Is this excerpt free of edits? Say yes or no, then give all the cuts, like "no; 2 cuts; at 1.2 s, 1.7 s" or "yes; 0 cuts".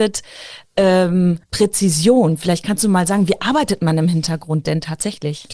no; 1 cut; at 1.4 s